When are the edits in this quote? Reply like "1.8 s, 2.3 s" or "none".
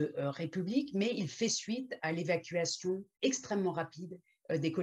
3.1 s